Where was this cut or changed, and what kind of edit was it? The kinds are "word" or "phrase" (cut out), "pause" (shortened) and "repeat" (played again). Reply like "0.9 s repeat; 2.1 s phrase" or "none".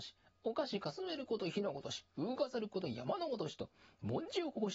none